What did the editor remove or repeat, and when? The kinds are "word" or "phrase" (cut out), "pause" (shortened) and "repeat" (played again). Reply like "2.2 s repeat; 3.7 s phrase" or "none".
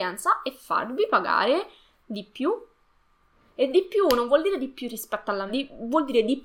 5.5 s word